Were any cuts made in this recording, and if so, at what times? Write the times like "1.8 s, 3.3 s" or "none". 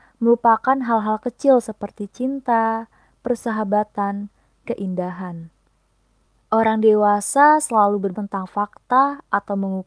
4.7 s, 8.1 s